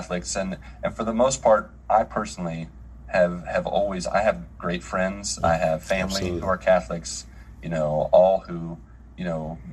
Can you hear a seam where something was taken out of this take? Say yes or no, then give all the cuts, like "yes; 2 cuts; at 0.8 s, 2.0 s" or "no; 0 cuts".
no; 0 cuts